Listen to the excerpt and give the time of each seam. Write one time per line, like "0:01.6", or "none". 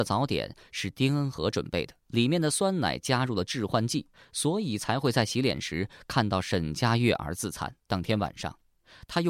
0:02.0
0:04.1
0:07.8